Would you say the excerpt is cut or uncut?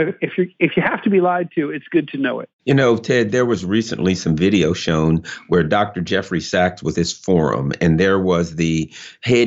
cut